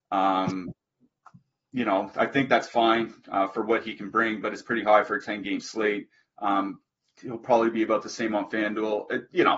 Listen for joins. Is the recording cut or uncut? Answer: uncut